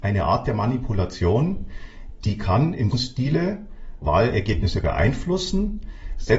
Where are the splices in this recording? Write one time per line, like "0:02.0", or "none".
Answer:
0:02.9

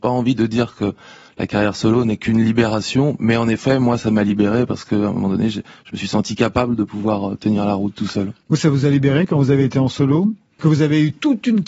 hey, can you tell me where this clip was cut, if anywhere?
0:10.6

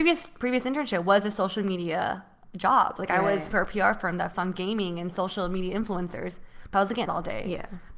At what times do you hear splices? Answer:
0:03.5
0:04.3
0:07.1

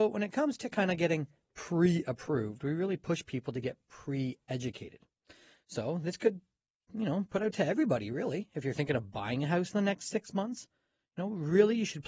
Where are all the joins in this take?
none

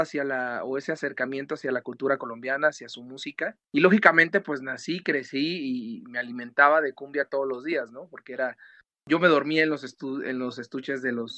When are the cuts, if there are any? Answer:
0:03.6

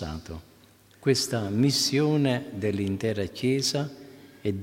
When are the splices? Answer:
none

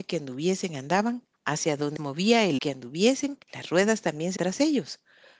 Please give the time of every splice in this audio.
0:01.3
0:02.0
0:02.6
0:03.4
0:04.4

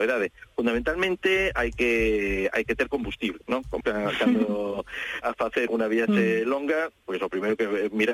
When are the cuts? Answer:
0:03.4
0:03.8
0:05.2
0:05.7

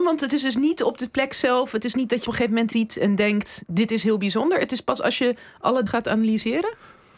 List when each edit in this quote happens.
0:02.3
0:02.7
0:05.9

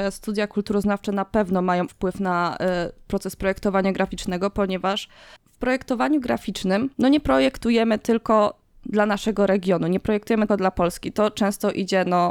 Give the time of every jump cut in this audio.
0:01.9
0:05.4
0:06.9
0:10.5

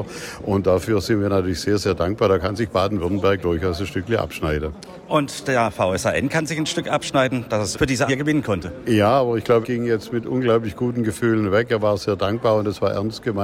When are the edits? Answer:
0:07.7
0:08.1
0:09.6

